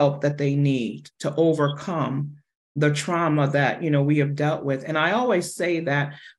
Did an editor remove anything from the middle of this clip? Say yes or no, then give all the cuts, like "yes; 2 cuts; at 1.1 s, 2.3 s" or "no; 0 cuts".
no; 0 cuts